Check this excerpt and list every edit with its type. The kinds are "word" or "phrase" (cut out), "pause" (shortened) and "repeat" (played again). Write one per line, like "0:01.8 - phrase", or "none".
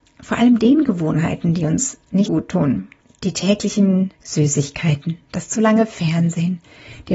0:02.3 - word
0:03.0 - pause
0:04.2 - pause